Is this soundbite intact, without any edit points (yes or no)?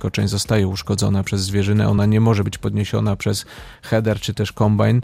yes